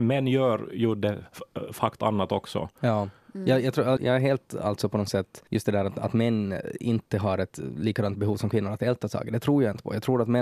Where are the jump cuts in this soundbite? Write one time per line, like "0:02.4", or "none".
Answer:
0:02.0
0:04.0
0:05.5